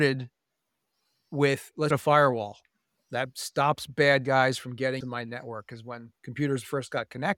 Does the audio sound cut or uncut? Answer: cut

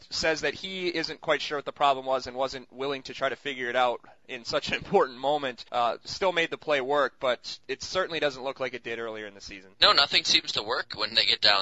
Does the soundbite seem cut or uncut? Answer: cut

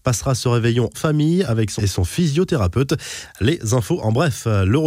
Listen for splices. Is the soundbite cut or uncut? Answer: cut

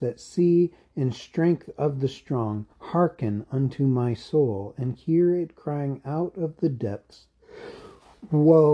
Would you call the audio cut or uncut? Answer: cut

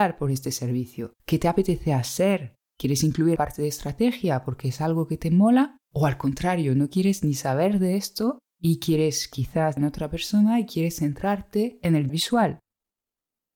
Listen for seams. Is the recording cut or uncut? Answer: cut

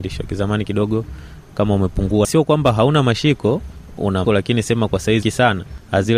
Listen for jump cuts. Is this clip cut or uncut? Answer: cut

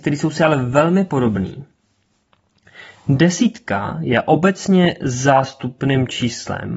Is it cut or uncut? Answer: uncut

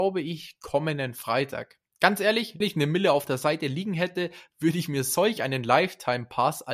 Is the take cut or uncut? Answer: cut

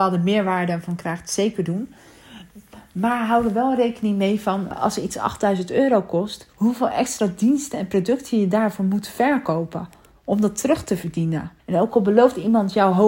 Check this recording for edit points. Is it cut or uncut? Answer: cut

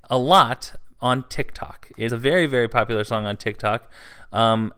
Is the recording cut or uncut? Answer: cut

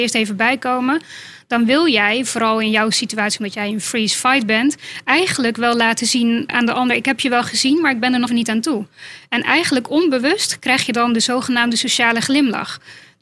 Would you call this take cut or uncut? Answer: cut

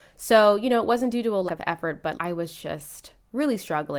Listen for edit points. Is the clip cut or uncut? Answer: cut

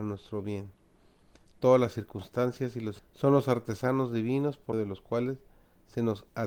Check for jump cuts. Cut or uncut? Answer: cut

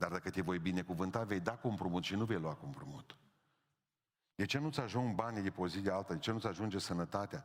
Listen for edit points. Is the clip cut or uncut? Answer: uncut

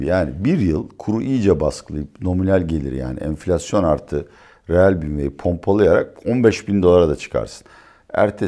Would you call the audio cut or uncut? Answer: uncut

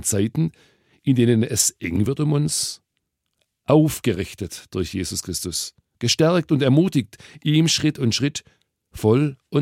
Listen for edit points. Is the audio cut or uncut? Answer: uncut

